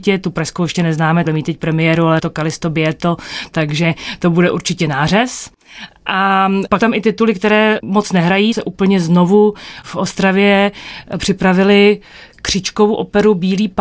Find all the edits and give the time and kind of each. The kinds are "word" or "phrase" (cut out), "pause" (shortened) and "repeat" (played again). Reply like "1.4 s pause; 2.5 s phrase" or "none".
1.3 s word; 2.2 s word; 6.8 s word; 7.8 s word; 8.5 s word; 9.8 s word